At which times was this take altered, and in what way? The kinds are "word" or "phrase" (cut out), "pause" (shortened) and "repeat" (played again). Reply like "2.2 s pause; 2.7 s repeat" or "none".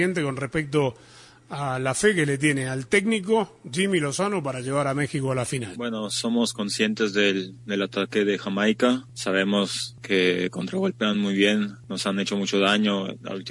none